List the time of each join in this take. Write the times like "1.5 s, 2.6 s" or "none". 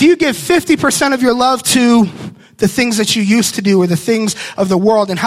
none